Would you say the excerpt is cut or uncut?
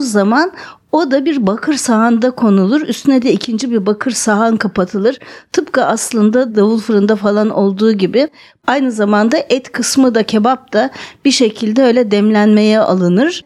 uncut